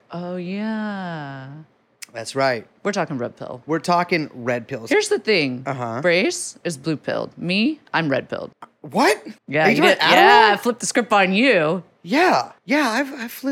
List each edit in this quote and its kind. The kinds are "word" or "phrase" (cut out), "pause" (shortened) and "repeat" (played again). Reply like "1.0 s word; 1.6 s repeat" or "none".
8.5 s pause; 9.4 s pause; 12.6 s pause